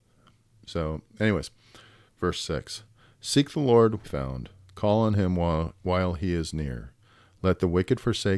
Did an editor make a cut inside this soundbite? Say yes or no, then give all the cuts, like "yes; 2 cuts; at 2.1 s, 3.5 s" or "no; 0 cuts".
yes; 2 cuts; at 2.1 s, 4.0 s